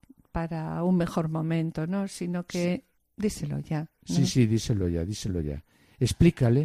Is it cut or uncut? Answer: uncut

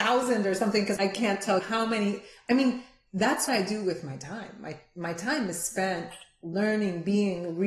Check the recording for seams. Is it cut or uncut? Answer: cut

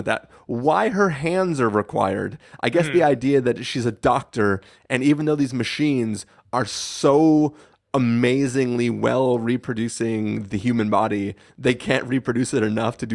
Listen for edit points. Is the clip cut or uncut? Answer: uncut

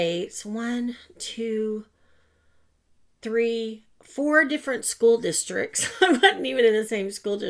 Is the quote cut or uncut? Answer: uncut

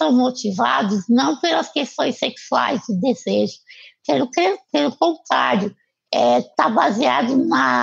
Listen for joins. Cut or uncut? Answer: uncut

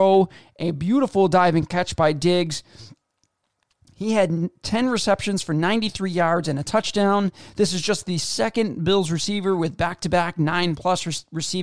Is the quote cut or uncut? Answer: uncut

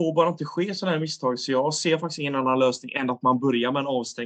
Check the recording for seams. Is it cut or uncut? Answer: uncut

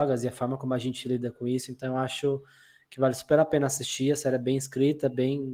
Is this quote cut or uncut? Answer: uncut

